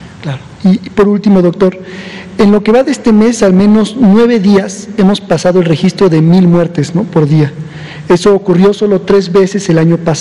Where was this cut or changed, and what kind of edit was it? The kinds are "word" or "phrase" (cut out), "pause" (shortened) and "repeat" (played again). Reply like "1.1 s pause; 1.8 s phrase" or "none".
none